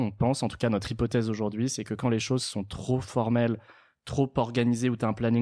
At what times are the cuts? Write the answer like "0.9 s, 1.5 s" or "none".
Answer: none

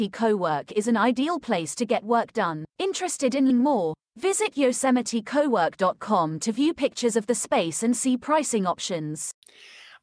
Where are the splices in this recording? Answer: 2.7 s, 3.5 s

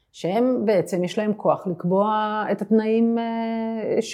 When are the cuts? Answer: none

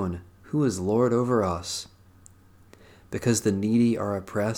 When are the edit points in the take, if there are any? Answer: none

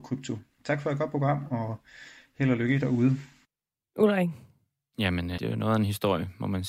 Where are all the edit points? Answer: 5.4 s

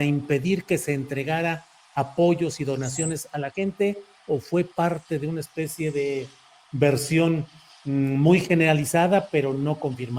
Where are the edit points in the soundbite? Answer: none

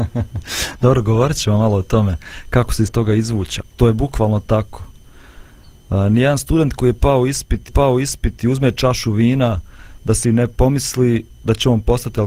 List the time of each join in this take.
2.9 s, 3.6 s, 7.7 s, 10.2 s

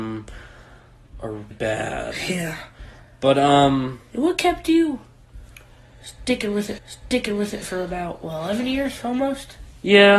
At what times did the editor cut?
1.5 s, 6.8 s

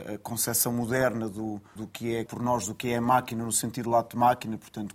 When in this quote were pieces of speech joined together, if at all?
1.8 s, 2.3 s

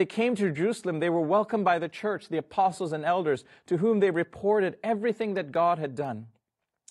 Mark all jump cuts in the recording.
none

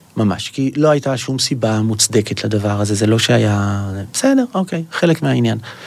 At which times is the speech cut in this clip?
none

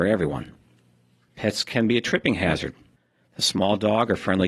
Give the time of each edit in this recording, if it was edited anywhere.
none

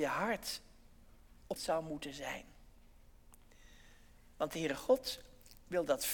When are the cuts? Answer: 1.6 s

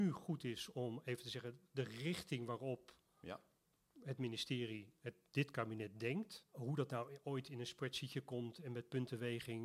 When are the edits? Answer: 6.5 s

